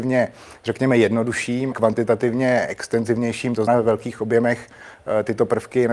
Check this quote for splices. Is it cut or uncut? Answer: cut